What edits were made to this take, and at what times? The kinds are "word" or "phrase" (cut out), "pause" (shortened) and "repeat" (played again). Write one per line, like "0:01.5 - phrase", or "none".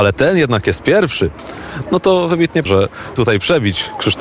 0:02.7 - word
0:03.2 - word